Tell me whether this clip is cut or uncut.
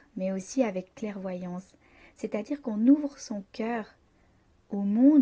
uncut